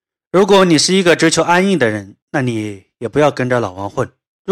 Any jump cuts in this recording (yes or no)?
yes